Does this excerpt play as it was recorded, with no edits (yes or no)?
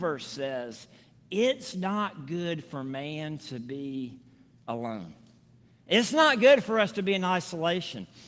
yes